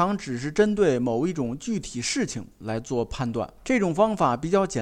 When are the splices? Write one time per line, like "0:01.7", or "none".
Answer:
0:03.6